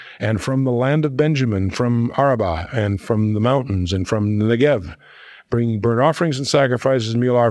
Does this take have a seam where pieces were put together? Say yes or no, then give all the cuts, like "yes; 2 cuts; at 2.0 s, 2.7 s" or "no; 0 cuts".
no; 0 cuts